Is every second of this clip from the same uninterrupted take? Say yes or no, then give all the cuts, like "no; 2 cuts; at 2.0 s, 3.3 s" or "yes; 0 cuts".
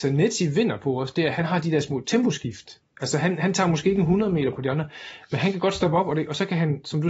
yes; 0 cuts